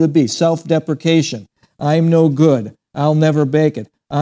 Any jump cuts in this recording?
no; 0 cuts

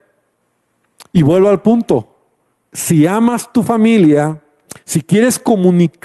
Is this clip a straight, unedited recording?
no; 1 cut; at 2.5 s

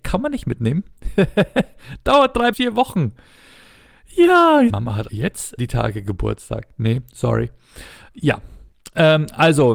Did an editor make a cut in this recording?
yes; 4 cuts; at 2.5 s, 4.7 s, 5.1 s, 5.6 s

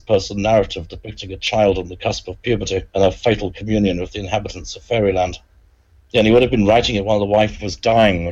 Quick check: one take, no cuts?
no; 1 cut; at 2.9 s

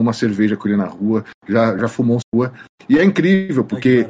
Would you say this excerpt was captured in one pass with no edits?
no; 2 cuts; at 1.8 s, 2.2 s

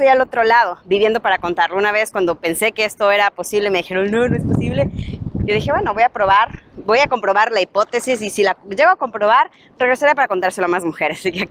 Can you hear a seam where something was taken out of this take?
no; 0 cuts

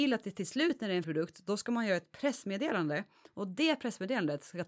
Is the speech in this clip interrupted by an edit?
yes; 1 cut; at 1.0 s

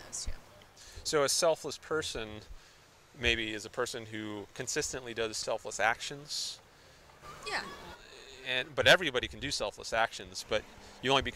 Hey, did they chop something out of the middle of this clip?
no; 0 cuts

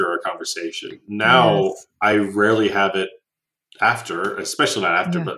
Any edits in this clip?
no; 0 cuts

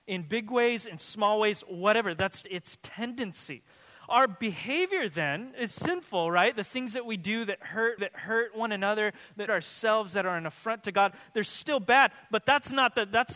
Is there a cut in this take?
yes; 4 cuts; at 2.4 s, 5.7 s, 8.0 s, 9.5 s

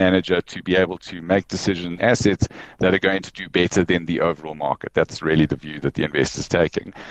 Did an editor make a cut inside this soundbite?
yes; 1 cut; at 2.0 s

